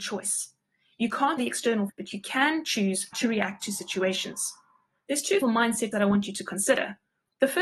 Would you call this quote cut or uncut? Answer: cut